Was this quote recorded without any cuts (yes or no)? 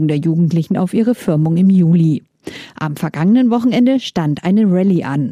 yes